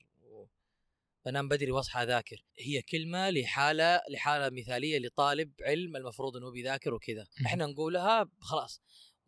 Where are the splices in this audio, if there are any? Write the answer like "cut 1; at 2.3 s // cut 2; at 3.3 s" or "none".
cut 1; at 2.5 s // cut 2; at 7.3 s